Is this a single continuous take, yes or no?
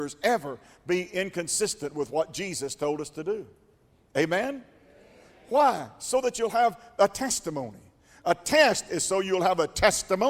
yes